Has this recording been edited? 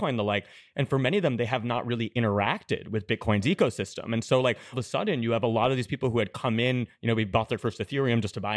yes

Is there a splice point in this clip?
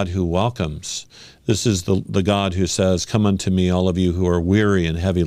no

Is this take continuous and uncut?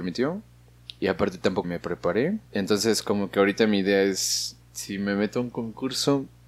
no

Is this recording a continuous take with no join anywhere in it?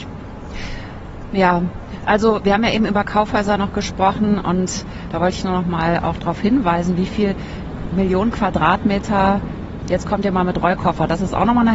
yes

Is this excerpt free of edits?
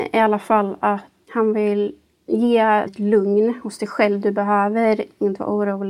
no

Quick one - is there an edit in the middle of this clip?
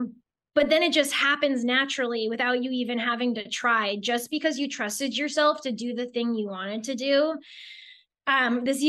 no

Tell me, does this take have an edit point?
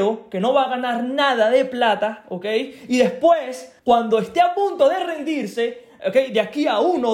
yes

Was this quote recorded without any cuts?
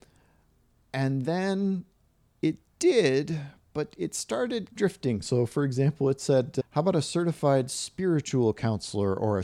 yes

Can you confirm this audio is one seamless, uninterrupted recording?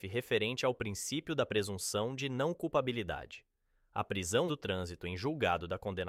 no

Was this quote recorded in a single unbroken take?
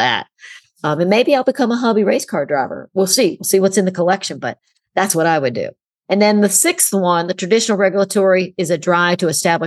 yes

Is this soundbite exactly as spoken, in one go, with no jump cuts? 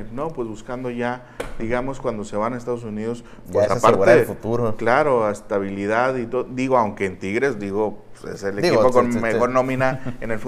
yes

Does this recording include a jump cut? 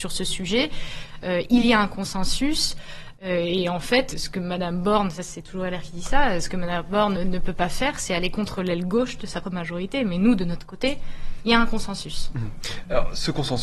yes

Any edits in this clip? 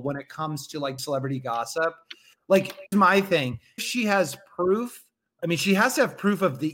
yes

